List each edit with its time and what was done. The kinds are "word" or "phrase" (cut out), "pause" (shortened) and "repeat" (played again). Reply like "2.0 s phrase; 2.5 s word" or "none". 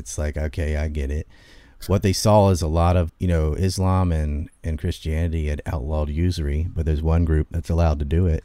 3.1 s word

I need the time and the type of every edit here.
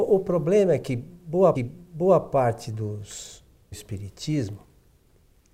1.5 s repeat; 3.7 s phrase

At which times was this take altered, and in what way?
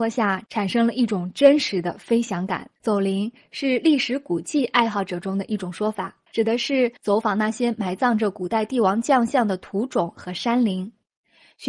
2.8 s pause; 6.3 s pause; 7.0 s pause

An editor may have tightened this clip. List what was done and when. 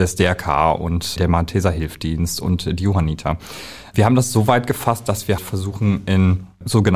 1.2 s word; 5.4 s word

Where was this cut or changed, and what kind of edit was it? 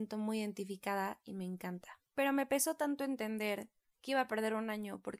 2.1 s pause

